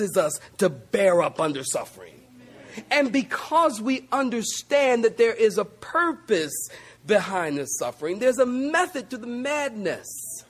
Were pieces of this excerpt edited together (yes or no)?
no